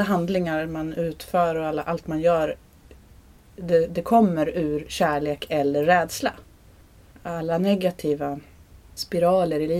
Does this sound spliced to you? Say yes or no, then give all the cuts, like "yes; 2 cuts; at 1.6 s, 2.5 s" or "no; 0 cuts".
no; 0 cuts